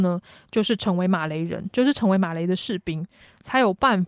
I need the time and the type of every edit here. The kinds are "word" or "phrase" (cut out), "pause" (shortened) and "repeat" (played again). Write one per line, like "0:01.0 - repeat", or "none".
none